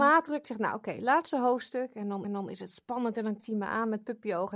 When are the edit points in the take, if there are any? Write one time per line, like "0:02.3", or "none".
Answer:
0:02.2
0:03.4